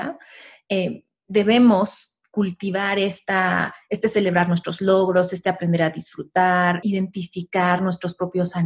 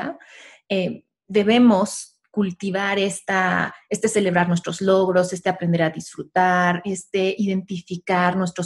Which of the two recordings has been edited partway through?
first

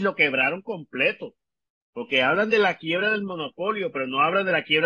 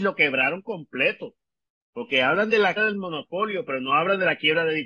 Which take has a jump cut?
second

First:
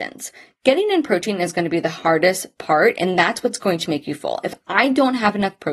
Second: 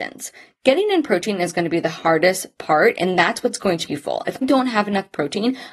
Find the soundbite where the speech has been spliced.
second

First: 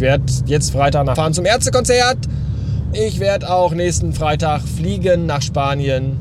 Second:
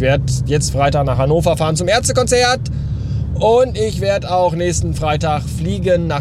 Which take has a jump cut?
first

